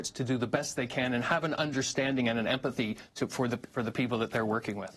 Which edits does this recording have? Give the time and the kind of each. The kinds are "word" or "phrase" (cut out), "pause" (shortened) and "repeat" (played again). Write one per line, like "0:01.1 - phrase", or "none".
none